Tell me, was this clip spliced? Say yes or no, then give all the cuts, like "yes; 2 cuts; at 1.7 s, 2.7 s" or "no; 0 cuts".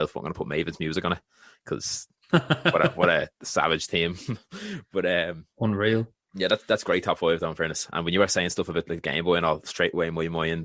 no; 0 cuts